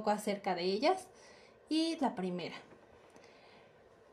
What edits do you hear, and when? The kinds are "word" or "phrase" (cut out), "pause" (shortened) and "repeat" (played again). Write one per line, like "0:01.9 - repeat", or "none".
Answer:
0:02.0 - word